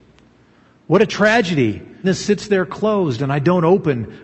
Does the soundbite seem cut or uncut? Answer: cut